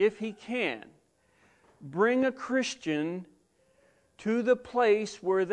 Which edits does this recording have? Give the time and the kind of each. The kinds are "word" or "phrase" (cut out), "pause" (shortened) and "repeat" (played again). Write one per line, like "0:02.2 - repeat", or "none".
none